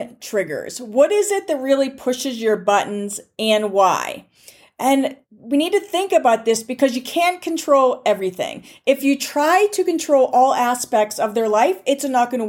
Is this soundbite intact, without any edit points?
yes; 0 cuts

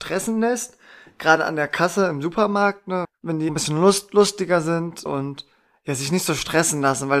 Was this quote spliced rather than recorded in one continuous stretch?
yes; 3 cuts; at 3.0 s, 3.5 s, 5.1 s

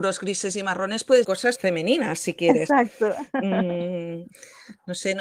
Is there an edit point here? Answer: yes; 2 cuts; at 1.2 s, 1.6 s

